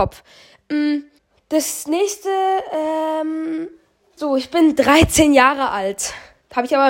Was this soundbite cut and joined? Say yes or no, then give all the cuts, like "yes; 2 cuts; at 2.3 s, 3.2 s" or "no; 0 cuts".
yes; 2 cuts; at 1.2 s, 4.2 s